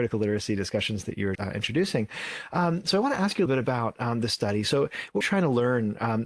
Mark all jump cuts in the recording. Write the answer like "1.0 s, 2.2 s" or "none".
1.4 s, 3.5 s, 5.2 s